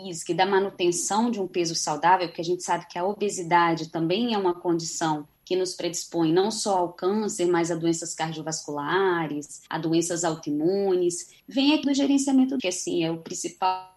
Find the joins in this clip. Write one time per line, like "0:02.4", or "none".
0:05.3
0:09.7
0:11.4
0:11.8
0:12.6